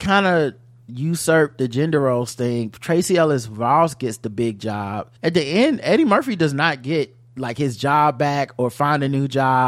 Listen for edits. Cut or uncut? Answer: cut